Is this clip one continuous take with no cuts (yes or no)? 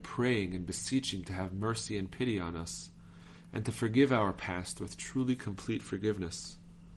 no